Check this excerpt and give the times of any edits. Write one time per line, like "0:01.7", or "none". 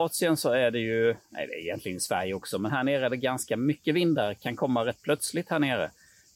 none